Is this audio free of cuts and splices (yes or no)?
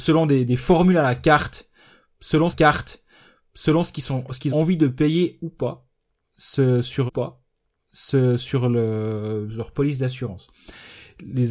no